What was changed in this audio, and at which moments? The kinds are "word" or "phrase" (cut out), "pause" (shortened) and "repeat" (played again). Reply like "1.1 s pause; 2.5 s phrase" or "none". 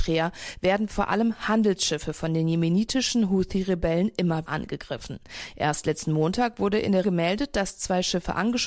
4.5 s word; 7.0 s word